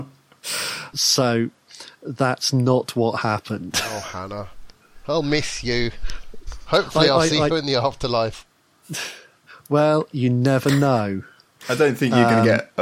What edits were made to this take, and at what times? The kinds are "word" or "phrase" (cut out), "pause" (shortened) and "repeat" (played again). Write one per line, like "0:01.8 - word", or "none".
none